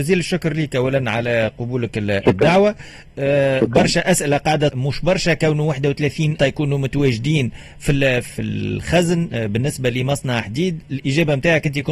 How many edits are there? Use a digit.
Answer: 3